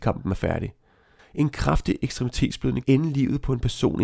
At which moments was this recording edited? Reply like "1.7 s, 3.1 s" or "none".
2.8 s

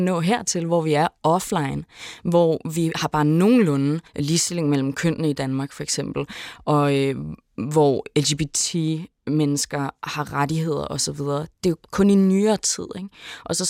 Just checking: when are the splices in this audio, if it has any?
4.1 s, 11.8 s

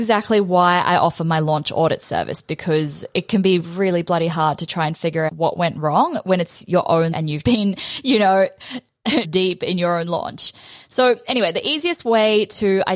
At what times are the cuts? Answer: 3.6 s, 5.3 s, 7.1 s, 7.4 s, 9.2 s

